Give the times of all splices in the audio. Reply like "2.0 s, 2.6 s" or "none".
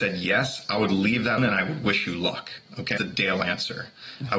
1.4 s, 3.0 s